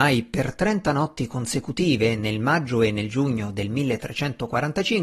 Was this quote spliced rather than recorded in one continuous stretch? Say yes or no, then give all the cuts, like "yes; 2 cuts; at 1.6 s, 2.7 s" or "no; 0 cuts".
no; 0 cuts